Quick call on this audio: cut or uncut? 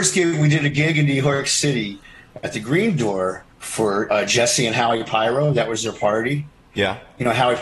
cut